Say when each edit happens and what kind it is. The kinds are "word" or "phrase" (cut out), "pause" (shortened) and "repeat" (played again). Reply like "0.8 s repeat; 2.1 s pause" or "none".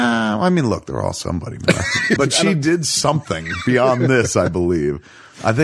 2.2 s word